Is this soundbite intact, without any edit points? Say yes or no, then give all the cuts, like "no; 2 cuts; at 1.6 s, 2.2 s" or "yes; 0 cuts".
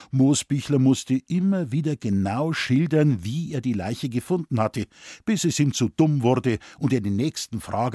yes; 0 cuts